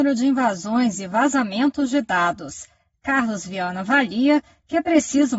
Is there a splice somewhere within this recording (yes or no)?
no